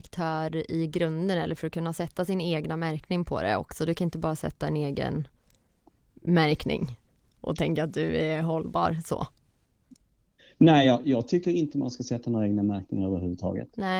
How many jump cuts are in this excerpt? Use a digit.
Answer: 0